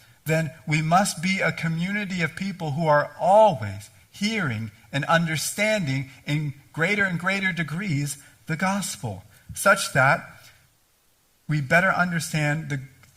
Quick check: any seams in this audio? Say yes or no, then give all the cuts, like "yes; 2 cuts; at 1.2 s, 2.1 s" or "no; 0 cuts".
no; 0 cuts